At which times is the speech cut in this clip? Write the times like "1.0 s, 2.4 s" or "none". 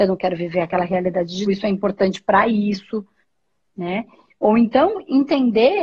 1.4 s, 3.2 s